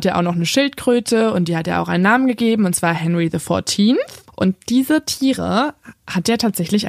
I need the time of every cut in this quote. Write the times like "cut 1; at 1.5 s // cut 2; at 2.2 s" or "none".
none